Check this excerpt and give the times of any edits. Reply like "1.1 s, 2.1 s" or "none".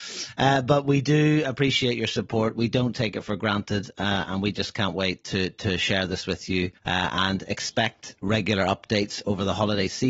6.8 s